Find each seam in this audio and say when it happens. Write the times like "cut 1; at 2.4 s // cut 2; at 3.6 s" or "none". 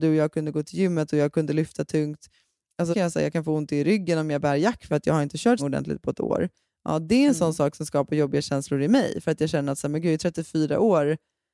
cut 1; at 2.9 s // cut 2; at 4.9 s // cut 3; at 5.6 s

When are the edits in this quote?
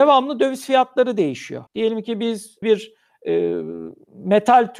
cut 1; at 1.7 s // cut 2; at 2.6 s

